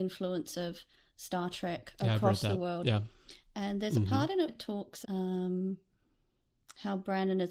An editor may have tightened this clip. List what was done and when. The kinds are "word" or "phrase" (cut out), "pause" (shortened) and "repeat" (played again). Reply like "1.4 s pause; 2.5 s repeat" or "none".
4.5 s word; 5.0 s word